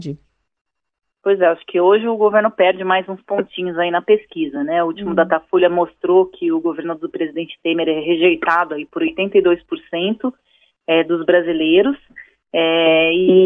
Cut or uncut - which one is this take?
uncut